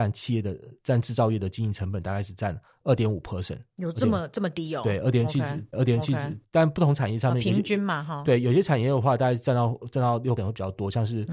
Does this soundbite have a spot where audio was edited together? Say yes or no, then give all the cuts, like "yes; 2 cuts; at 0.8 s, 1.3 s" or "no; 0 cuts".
yes; 2 cuts; at 5.7 s, 10.4 s